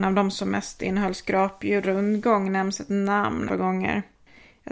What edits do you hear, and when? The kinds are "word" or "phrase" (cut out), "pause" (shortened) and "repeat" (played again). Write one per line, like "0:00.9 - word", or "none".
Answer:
0:01.8 - word
0:03.5 - word